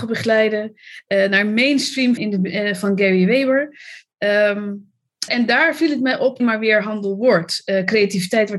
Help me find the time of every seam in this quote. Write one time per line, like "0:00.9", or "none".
0:02.2
0:05.3
0:06.4